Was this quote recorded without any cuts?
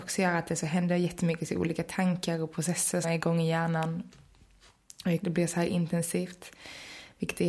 no; 2 cuts; at 3.0 s, 5.2 s

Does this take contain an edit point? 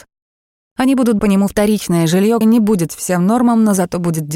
yes; 3 cuts; at 1.2 s, 2.4 s, 2.9 s

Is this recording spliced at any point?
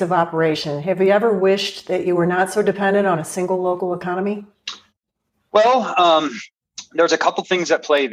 no; 0 cuts

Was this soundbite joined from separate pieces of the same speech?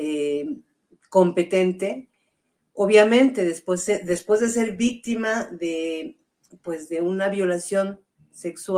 no; 0 cuts

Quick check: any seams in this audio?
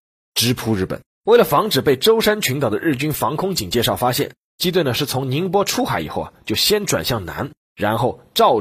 yes; 1 cut; at 1.1 s

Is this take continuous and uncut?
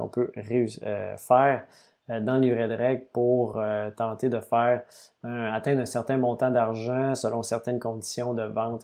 yes; 0 cuts

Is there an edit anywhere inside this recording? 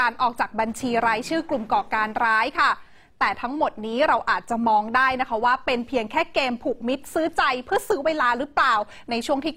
no; 0 cuts

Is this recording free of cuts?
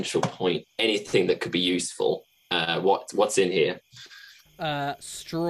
yes; 0 cuts

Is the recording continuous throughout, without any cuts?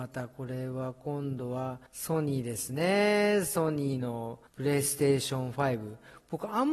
no; 2 cuts; at 1.9 s, 4.5 s

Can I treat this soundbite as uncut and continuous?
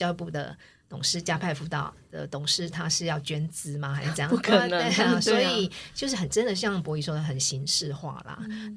yes; 0 cuts

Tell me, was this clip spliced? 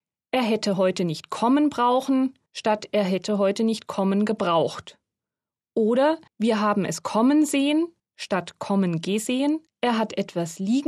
yes; 4 cuts; at 2.5 s, 6.3 s, 8.0 s, 9.7 s

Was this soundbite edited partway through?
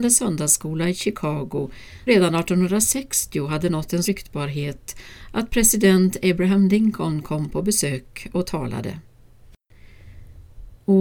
yes; 2 cuts; at 2.1 s, 4.0 s

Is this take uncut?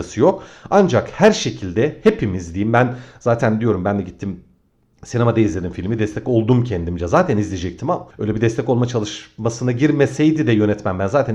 yes; 0 cuts

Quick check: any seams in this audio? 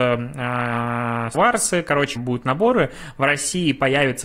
yes; 2 cuts; at 1.3 s, 2.2 s

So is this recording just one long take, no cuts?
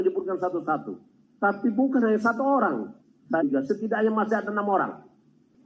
no; 3 cuts; at 1.2 s, 3.0 s, 3.4 s

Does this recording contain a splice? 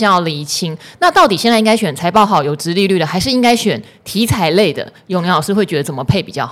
no; 0 cuts

